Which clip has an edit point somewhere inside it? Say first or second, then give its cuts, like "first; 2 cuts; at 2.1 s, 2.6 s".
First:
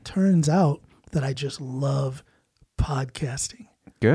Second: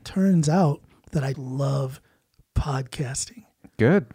second; 1 cut; at 1.3 s